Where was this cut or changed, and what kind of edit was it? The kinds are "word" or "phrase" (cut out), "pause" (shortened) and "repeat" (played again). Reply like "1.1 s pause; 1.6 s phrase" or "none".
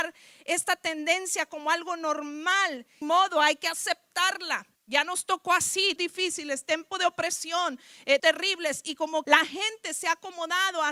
3.0 s phrase; 4.7 s pause; 6.0 s word; 6.9 s word; 8.2 s word; 9.2 s word